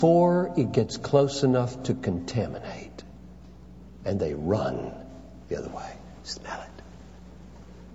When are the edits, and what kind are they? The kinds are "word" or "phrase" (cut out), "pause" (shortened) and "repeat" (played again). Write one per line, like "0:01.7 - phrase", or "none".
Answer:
none